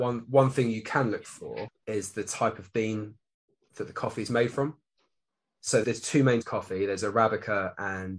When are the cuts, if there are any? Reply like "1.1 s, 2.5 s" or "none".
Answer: 5.8 s, 6.4 s